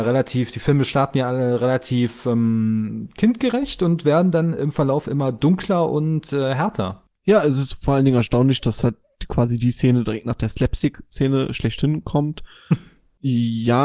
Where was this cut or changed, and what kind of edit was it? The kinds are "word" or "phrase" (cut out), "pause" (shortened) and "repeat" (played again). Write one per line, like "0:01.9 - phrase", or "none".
none